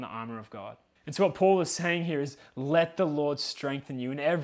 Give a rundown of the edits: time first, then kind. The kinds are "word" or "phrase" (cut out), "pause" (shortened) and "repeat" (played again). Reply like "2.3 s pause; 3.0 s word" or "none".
1.0 s pause